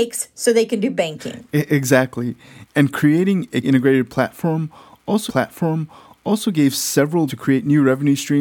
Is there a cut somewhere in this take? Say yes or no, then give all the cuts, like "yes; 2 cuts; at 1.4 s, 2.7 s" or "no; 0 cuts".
yes; 3 cuts; at 3.6 s, 5.3 s, 7.3 s